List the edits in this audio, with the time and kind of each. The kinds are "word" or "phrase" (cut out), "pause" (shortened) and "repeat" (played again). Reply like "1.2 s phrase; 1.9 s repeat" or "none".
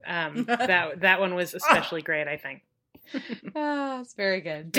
none